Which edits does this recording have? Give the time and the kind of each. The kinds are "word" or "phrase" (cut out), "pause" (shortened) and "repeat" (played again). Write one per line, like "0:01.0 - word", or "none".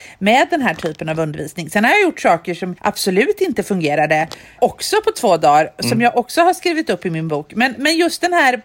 0:02.8 - pause
0:04.6 - word